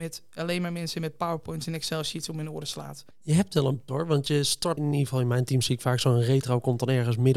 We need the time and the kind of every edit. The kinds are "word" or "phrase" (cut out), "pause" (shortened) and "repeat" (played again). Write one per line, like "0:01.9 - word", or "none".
0:03.1 - pause
0:03.9 - word
0:04.8 - word